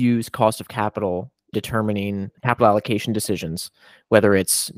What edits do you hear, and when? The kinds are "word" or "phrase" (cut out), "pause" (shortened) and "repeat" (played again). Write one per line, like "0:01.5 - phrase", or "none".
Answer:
0:01.5 - word
0:02.4 - word